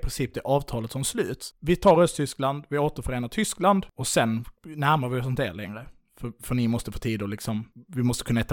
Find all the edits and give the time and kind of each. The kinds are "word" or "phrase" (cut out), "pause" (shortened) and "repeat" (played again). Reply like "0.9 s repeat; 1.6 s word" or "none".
none